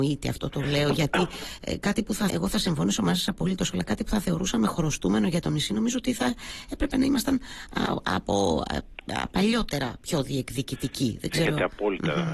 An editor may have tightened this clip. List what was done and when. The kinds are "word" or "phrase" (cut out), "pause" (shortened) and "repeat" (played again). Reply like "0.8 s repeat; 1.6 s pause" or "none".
1.8 s word; 2.3 s word